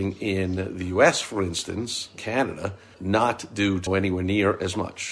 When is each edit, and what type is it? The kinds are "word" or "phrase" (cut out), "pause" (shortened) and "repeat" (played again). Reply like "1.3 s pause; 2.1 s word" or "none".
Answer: 2.2 s word; 2.9 s word; 3.9 s word